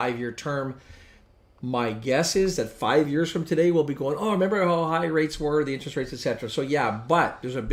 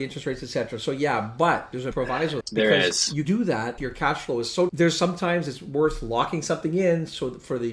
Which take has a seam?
second; 5 cuts; at 1.9 s, 2.4 s, 3.2 s, 3.8 s, 4.7 s

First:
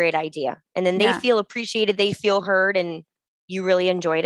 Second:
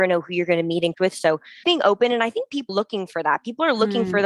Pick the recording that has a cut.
second; 3 cuts; at 0.9 s, 1.6 s, 2.7 s

